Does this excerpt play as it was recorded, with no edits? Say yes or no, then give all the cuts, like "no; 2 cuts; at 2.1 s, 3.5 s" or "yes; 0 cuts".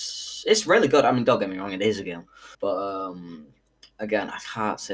no; 1 cut; at 2.5 s